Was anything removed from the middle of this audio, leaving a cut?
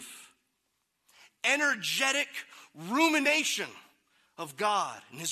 no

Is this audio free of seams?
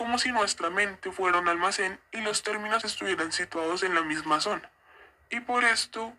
no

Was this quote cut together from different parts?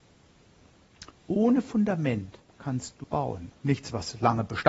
yes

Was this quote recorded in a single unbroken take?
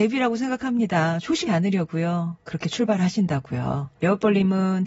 no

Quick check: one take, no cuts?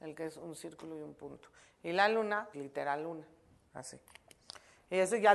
no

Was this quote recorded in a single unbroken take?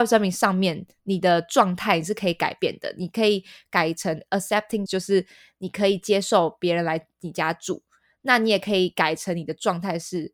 no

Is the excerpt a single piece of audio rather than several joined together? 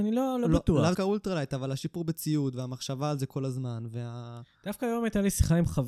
no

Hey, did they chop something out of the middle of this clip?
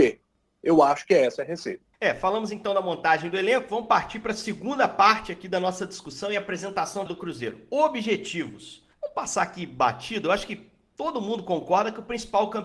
yes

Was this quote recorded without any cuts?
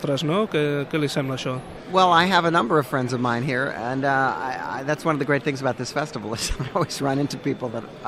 yes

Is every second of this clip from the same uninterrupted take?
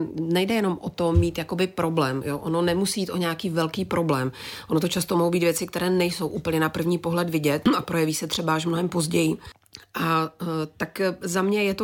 yes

